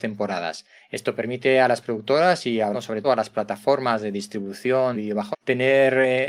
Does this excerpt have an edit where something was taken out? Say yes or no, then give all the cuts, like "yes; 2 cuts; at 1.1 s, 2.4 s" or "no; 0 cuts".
yes; 4 cuts; at 2.7 s, 3.0 s, 4.9 s, 5.3 s